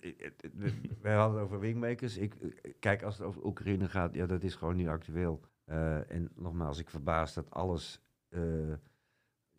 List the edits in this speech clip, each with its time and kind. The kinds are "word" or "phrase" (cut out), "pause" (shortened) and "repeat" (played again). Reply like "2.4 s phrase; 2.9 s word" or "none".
5.5 s pause